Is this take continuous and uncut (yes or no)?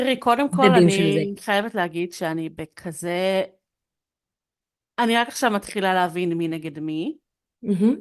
yes